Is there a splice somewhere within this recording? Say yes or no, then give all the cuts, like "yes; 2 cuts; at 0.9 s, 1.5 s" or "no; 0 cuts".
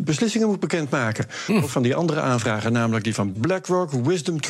yes; 2 cuts; at 1.7 s, 3.3 s